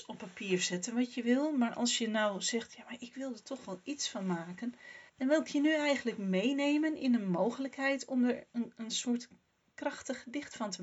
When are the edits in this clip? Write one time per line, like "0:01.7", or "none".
0:05.1